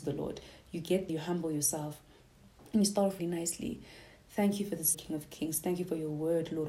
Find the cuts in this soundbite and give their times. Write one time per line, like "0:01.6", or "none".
0:01.1
0:03.2
0:04.9